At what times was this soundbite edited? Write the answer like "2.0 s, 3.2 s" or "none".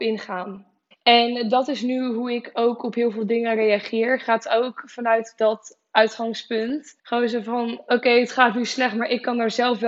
0.9 s, 7.0 s